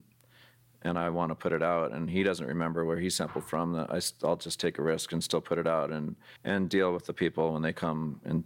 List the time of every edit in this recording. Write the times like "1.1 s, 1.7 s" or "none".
6.4 s